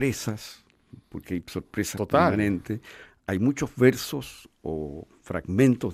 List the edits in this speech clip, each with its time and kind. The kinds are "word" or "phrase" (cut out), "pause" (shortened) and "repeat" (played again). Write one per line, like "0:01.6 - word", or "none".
none